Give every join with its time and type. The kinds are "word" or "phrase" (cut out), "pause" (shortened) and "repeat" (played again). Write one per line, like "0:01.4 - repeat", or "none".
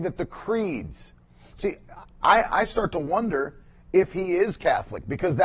none